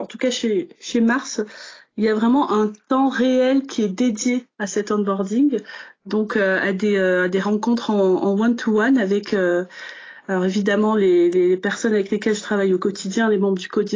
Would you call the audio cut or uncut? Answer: uncut